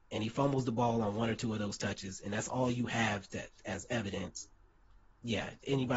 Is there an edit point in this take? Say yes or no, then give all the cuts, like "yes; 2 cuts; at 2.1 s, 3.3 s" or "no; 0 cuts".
no; 0 cuts